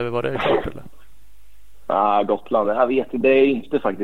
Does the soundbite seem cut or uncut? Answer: uncut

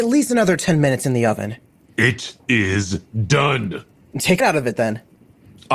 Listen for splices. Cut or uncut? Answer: cut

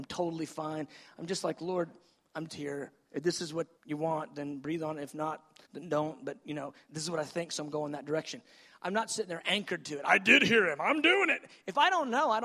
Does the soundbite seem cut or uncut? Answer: cut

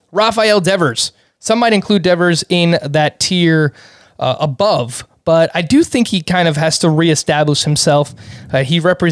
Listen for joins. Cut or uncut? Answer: uncut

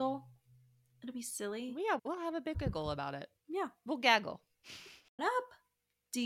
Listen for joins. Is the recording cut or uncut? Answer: cut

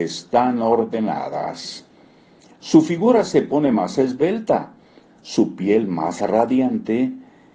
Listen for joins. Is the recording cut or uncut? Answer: uncut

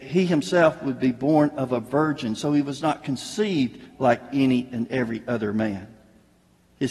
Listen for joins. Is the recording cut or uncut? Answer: uncut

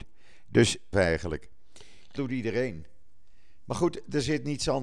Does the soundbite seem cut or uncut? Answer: cut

